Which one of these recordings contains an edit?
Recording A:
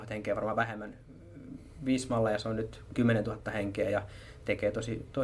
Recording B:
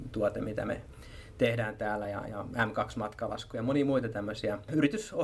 A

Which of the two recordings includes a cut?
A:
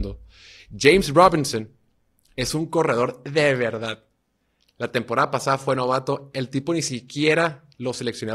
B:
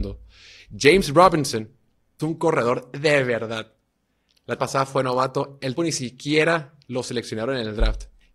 B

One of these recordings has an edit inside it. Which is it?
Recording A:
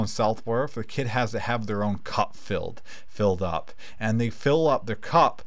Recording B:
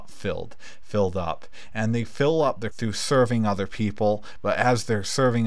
B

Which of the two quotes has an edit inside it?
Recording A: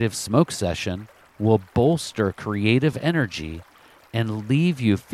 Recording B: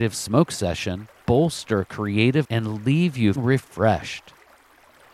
B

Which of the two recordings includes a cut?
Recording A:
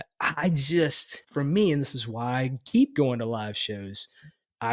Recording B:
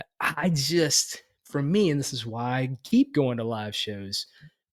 A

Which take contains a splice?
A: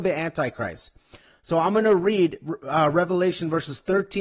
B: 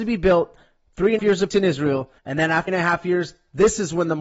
B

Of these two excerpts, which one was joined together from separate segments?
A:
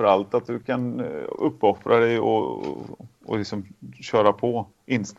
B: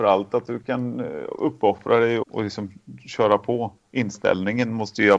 B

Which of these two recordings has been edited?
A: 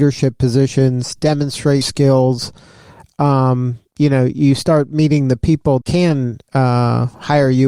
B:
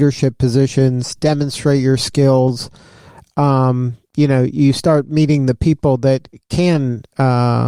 A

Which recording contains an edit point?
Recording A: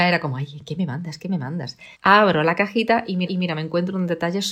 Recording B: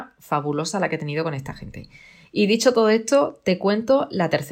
A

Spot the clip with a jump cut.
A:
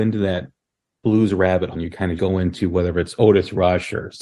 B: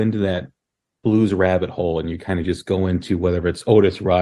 A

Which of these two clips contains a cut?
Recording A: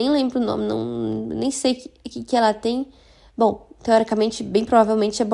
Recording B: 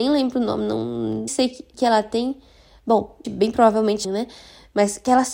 B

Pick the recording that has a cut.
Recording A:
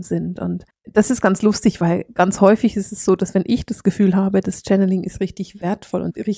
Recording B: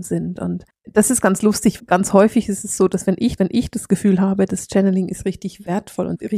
B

